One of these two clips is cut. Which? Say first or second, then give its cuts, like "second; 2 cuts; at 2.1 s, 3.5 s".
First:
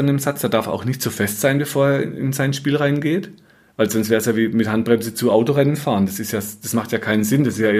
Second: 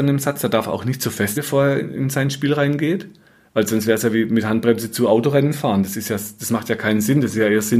second; 1 cut; at 1.4 s